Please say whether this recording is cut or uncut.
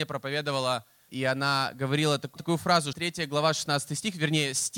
cut